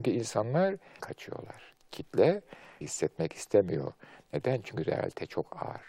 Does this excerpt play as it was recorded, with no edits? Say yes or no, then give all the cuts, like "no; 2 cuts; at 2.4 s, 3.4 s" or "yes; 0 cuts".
no; 2 cuts; at 1.0 s, 2.8 s